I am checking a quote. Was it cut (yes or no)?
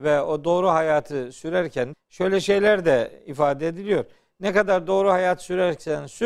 yes